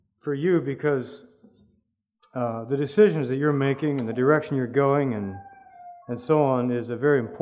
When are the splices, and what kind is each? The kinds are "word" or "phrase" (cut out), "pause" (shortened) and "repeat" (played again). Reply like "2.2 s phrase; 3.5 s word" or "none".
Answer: none